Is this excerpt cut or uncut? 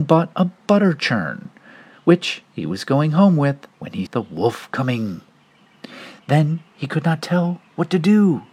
cut